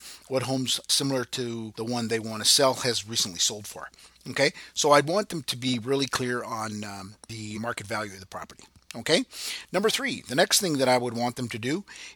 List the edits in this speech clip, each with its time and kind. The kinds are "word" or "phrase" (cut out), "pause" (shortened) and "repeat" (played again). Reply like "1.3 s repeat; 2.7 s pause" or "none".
7.5 s word

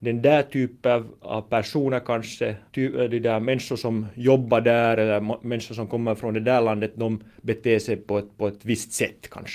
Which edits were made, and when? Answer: 2.7 s pause

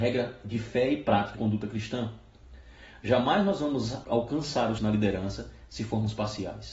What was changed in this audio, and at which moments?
1.3 s word; 4.0 s word; 4.8 s word

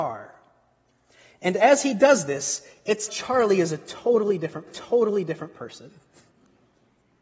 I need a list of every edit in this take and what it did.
3.1 s word; 4.7 s repeat

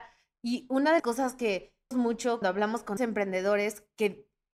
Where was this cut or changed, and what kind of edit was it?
1.0 s word; 1.9 s word; 2.4 s word; 3.0 s word

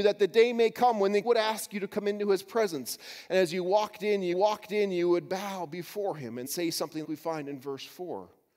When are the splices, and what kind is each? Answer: 1.2 s word; 4.3 s repeat; 6.4 s word; 7.0 s word

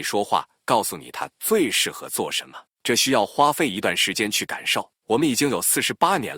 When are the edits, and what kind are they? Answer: 2.7 s pause; 5.0 s pause

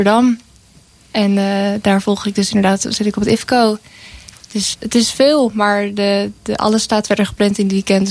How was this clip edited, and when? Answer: 4.7 s word

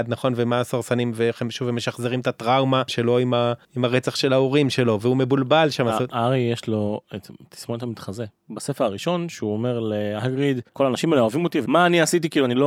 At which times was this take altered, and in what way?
3.6 s pause; 10.7 s pause

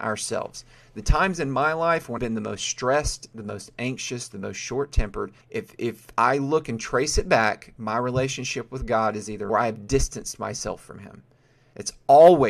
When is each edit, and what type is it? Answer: 2.2 s word; 5.4 s pause; 9.5 s phrase

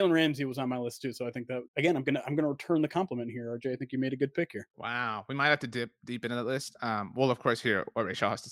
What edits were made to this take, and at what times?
1.7 s pause; 4.7 s pause

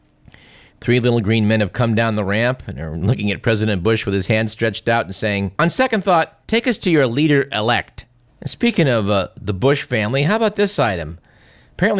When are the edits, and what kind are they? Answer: 5.6 s pause; 6.4 s pause; 8.3 s pause

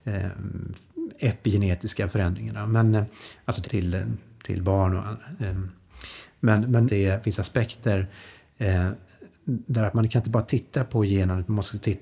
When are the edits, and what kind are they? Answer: 3.6 s word; 6.9 s phrase

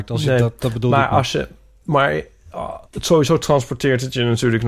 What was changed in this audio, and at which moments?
2.9 s pause

